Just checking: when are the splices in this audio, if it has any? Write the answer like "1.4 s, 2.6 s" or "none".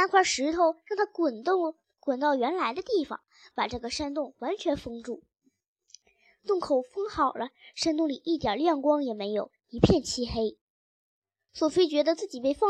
none